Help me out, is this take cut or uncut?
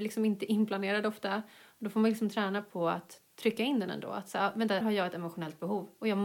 cut